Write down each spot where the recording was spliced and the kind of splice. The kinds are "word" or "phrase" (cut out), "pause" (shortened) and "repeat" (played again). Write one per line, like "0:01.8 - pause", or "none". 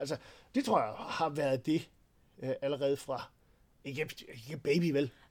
none